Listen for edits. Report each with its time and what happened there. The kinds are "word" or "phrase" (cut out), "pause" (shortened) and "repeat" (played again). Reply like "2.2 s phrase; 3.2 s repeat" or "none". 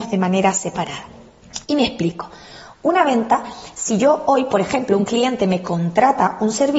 1.6 s pause